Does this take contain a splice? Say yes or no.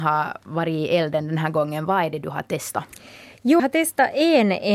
yes